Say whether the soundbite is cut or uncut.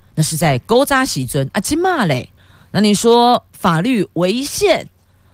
cut